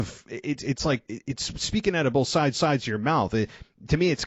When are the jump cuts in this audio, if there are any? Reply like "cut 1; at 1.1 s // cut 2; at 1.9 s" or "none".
cut 1; at 1.1 s // cut 2; at 2.5 s